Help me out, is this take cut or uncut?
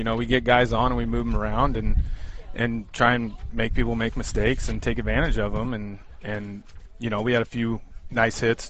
uncut